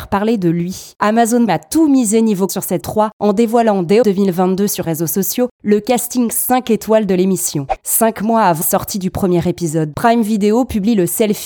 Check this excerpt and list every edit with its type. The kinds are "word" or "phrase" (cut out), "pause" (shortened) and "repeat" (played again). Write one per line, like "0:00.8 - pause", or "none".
0:01.5 - word
0:02.5 - word
0:02.8 - word
0:04.0 - word
0:04.8 - word
0:08.6 - word
0:09.9 - word